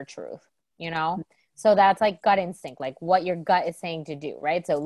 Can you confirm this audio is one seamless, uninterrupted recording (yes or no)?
yes